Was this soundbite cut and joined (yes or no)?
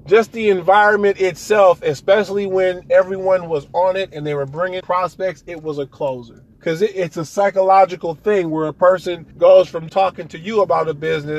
yes